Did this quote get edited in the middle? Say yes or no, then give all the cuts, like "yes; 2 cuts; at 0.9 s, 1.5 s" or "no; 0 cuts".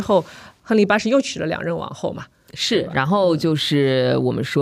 no; 0 cuts